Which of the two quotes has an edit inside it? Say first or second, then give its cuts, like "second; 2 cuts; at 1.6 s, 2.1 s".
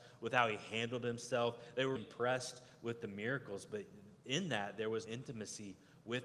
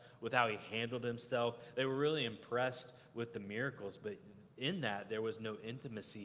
first; 2 cuts; at 2.0 s, 5.1 s